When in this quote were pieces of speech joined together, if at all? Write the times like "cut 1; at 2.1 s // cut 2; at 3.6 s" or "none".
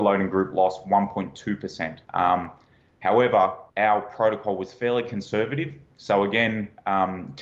cut 1; at 2.0 s // cut 2; at 3.7 s